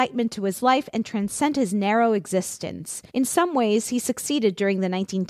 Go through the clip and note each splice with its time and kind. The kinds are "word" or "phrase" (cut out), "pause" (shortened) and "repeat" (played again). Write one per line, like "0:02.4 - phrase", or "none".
0:03.1 - pause